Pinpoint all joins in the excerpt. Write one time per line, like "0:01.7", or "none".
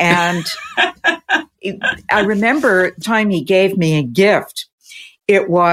0:03.0